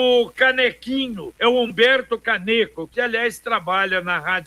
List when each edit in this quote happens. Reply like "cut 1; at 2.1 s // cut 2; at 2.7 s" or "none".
cut 1; at 1.4 s